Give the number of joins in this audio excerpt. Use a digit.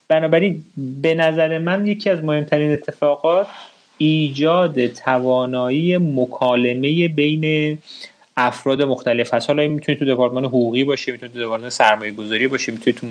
0